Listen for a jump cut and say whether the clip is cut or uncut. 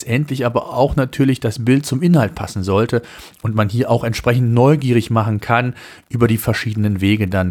uncut